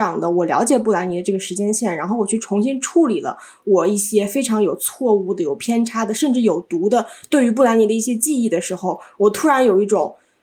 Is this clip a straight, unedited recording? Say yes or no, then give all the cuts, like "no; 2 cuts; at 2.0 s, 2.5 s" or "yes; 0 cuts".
yes; 0 cuts